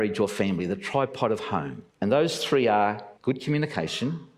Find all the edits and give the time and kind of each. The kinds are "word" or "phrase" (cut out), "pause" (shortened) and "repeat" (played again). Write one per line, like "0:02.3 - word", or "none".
0:01.9 - pause
0:03.2 - pause